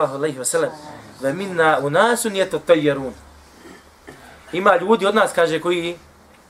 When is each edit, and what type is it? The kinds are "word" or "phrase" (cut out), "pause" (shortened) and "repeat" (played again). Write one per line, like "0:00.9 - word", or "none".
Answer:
none